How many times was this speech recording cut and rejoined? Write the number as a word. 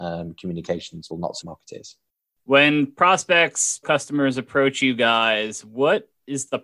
three